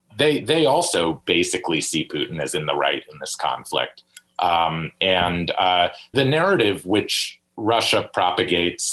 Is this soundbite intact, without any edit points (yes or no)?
no